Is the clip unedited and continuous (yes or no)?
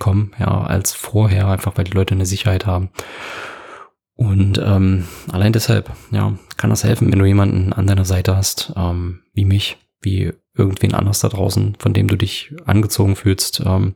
yes